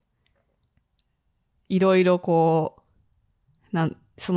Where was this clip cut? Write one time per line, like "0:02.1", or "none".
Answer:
none